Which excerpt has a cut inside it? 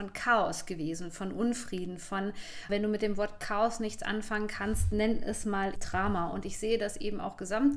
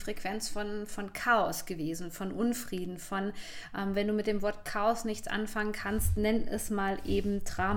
first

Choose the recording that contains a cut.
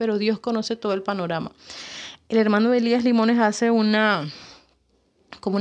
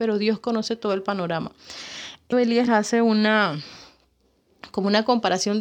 second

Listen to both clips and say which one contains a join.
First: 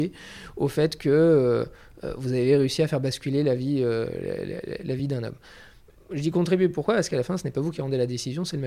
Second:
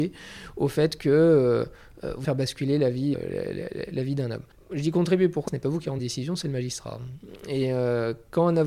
second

